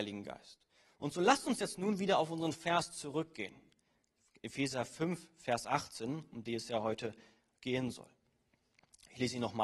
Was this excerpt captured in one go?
yes; 0 cuts

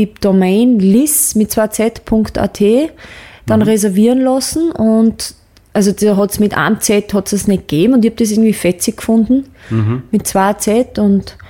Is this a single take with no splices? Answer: yes; 0 cuts

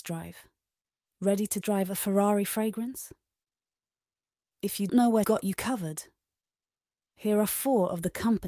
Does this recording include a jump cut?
yes; 3 cuts; at 1.6 s, 4.9 s, 5.2 s

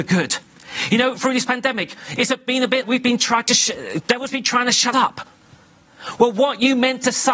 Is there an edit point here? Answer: yes; 3 cuts; at 1.2 s, 2.8 s, 4.9 s

